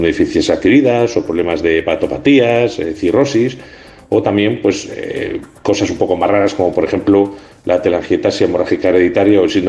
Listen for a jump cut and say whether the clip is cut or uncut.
uncut